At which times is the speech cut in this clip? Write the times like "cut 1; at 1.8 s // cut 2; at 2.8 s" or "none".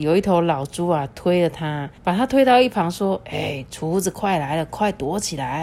cut 1; at 2.0 s

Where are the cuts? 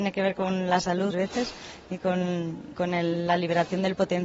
cut 1; at 1.1 s // cut 2; at 2.7 s

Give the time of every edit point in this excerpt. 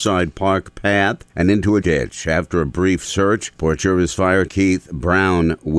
cut 1; at 1.3 s // cut 2; at 1.8 s // cut 3; at 3.6 s // cut 4; at 4.5 s

